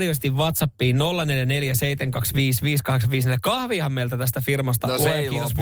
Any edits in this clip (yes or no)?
no